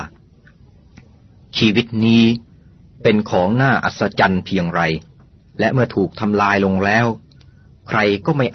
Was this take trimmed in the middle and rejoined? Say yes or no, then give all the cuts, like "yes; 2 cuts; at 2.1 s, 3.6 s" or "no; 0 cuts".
yes; 1 cut; at 5.2 s